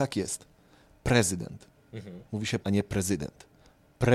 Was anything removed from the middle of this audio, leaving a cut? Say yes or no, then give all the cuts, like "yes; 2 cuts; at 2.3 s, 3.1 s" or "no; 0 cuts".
yes; 1 cut; at 2.6 s